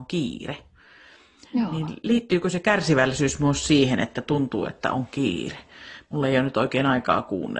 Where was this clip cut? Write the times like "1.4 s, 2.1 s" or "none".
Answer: none